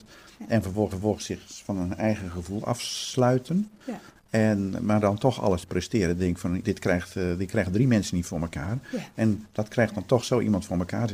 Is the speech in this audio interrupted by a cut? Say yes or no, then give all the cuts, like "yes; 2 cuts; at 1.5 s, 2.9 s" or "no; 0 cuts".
yes; 1 cut; at 0.9 s